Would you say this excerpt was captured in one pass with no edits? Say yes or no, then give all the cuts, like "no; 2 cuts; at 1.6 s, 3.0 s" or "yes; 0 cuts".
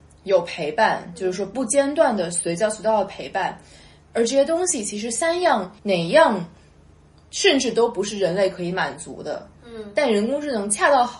no; 1 cut; at 5.8 s